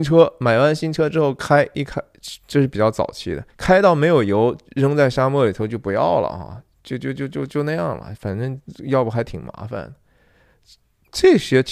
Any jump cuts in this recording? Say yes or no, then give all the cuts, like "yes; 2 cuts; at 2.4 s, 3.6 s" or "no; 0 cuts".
yes; 1 cut; at 3.5 s